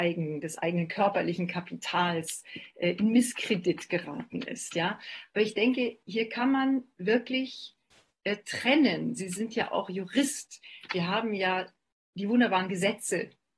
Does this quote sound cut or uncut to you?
uncut